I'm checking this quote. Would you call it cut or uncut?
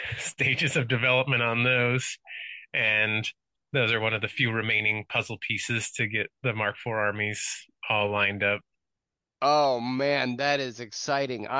uncut